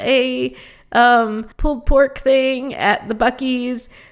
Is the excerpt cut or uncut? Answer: cut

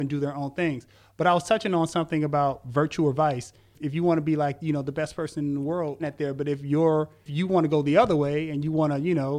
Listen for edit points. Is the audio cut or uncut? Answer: cut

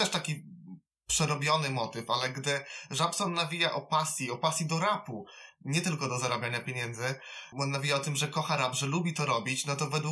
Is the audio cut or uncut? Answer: cut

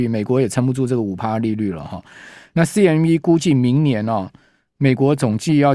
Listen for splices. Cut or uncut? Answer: uncut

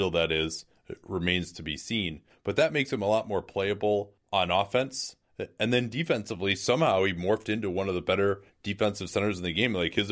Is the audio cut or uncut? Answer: uncut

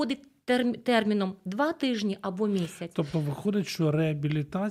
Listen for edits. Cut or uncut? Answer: uncut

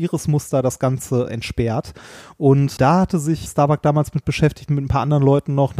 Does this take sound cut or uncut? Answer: cut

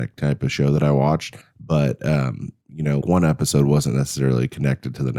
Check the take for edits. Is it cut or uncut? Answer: cut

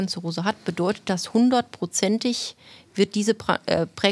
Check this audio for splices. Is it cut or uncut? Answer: uncut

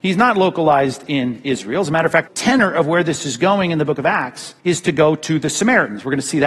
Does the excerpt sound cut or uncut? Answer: cut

